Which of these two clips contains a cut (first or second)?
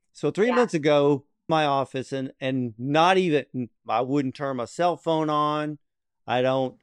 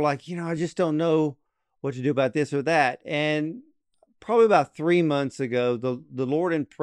first